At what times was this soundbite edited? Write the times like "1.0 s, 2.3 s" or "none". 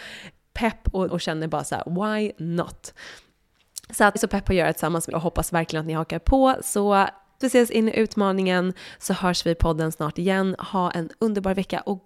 1.1 s, 4.2 s, 5.1 s, 7.4 s